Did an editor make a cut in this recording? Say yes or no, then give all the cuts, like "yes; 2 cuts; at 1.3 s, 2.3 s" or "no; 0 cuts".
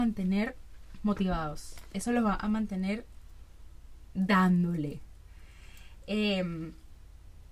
no; 0 cuts